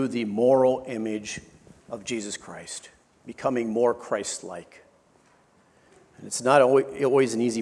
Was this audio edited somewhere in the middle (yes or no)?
no